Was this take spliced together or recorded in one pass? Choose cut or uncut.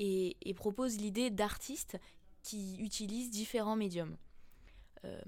uncut